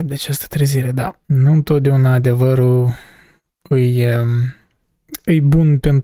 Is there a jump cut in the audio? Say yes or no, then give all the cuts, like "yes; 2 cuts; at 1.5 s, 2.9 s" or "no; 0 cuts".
yes; 1 cut; at 1.2 s